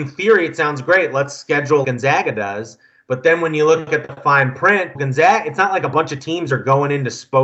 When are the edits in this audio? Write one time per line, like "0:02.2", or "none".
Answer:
0:01.8
0:04.9